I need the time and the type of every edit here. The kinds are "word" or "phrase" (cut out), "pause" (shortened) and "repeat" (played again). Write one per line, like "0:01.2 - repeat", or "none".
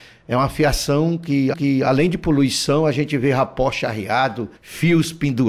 0:01.5 - repeat
0:04.6 - pause